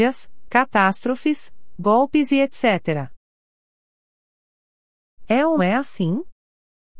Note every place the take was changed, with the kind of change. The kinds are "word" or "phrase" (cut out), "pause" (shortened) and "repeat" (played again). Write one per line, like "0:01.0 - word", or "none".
0:05.6 - word